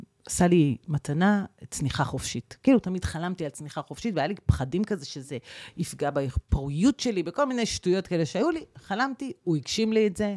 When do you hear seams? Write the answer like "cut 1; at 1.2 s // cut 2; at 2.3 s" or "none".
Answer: none